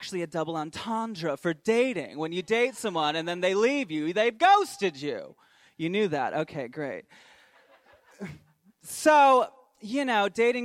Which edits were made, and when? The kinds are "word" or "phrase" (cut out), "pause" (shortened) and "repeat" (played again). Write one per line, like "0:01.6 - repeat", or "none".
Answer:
none